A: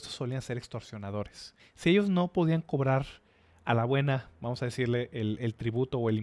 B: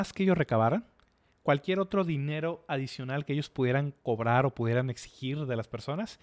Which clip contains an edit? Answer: A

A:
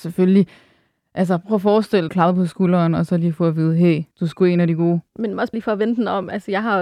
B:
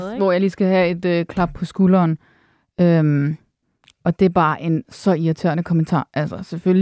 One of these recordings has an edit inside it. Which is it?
A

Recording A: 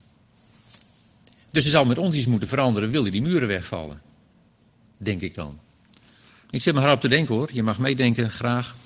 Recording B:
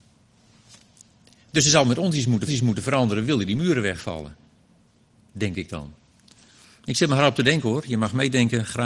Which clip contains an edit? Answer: B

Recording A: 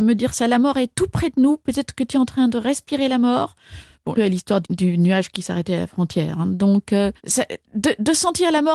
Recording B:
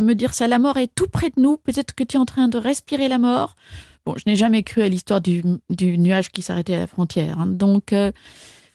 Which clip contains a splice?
A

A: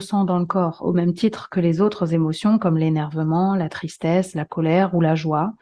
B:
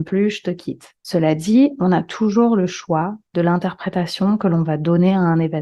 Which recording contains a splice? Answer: B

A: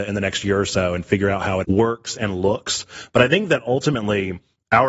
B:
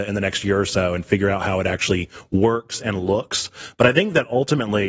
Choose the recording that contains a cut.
A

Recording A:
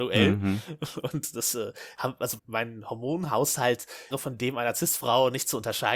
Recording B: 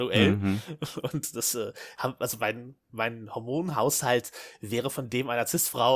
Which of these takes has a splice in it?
A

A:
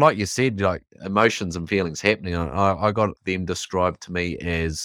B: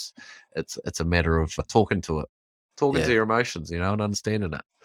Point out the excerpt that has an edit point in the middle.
A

